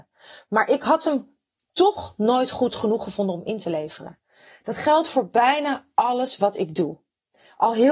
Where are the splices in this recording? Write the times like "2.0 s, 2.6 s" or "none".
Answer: none